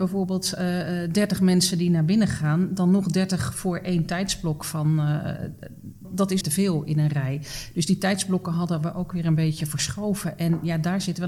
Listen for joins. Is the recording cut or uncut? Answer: cut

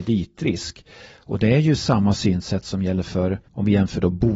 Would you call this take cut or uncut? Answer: cut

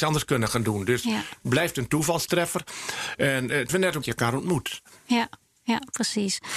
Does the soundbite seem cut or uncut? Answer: cut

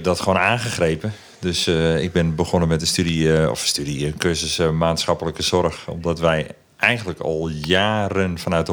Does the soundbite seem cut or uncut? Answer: uncut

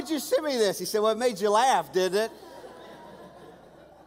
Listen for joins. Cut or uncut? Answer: uncut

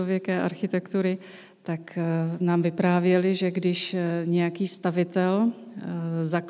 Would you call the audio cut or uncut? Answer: uncut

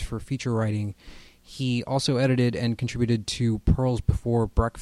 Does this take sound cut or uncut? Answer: uncut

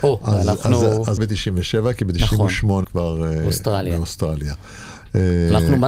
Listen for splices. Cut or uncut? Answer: cut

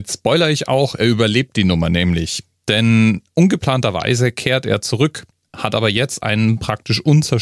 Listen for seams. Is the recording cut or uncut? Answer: uncut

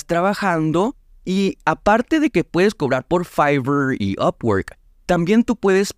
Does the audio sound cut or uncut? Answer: uncut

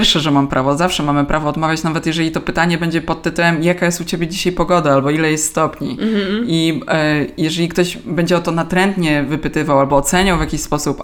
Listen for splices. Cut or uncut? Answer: uncut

